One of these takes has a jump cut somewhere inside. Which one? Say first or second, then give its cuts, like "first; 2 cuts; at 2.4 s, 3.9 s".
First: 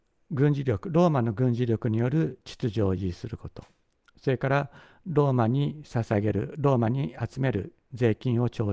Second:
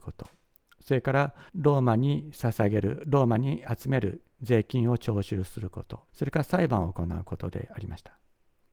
second; 2 cuts; at 1.5 s, 6.1 s